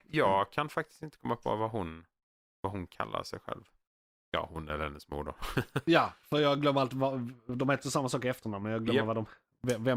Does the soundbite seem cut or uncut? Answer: uncut